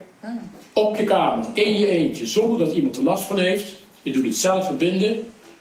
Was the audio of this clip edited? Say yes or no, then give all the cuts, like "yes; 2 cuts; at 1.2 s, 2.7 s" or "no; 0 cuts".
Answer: no; 0 cuts